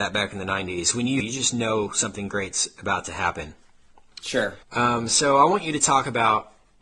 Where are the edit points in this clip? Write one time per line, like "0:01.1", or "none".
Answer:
0:01.2
0:04.6

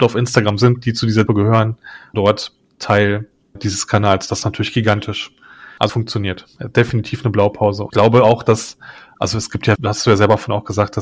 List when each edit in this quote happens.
0:01.3
0:02.1
0:03.6
0:05.9
0:07.9
0:09.8

